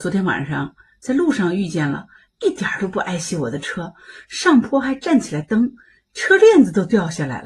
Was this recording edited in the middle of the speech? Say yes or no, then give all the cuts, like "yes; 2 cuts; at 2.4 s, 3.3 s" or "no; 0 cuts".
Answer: no; 0 cuts